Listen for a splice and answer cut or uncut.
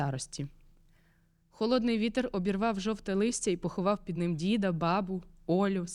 uncut